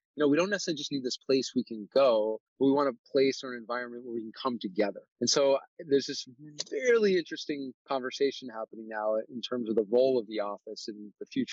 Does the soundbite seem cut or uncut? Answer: cut